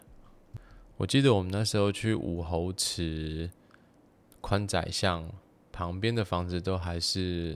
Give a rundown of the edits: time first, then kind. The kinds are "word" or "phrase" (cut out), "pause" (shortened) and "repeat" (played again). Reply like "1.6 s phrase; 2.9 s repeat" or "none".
none